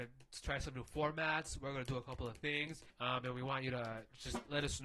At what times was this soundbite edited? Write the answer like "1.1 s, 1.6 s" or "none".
2.9 s